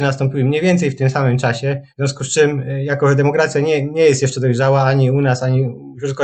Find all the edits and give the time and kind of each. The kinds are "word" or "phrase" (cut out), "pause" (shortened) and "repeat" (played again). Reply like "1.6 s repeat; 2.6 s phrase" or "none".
1.9 s pause